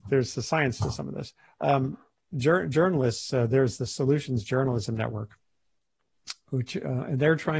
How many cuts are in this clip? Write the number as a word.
zero